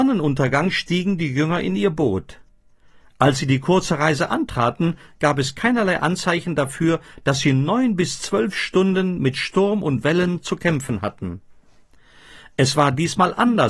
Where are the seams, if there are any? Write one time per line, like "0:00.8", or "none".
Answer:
none